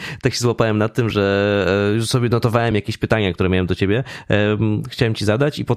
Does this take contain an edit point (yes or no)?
no